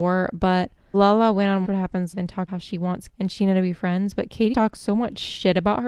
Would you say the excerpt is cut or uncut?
cut